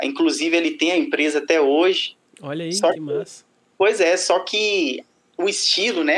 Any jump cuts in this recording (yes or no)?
no